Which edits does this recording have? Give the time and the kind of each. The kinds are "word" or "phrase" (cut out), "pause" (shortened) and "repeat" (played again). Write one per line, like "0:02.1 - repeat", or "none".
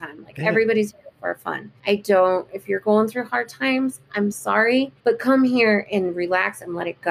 0:01.8 - pause
0:05.0 - pause